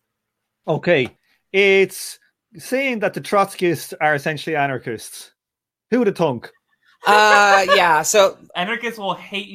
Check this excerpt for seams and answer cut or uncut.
uncut